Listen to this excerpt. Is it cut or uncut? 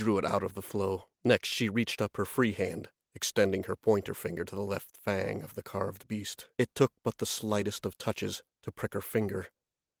cut